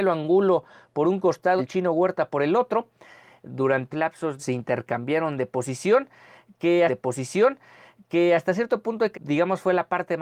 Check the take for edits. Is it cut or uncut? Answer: cut